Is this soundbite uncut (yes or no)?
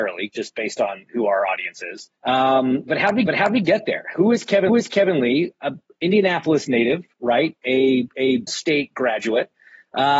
no